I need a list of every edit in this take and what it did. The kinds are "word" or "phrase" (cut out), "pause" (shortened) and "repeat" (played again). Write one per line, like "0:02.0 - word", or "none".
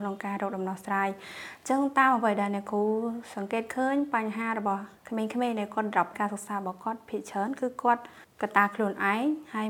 0:05.0 - pause
0:06.1 - word
0:08.2 - pause